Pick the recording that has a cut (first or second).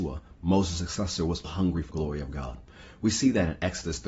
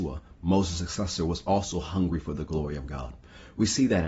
first